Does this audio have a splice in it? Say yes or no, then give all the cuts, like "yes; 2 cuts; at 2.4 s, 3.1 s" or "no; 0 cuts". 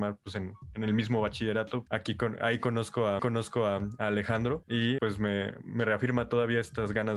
yes; 3 cuts; at 1.9 s, 3.2 s, 5.0 s